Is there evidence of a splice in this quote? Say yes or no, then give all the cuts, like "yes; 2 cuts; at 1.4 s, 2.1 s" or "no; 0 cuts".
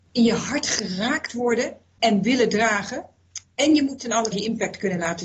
yes; 2 cuts; at 2.2 s, 4.3 s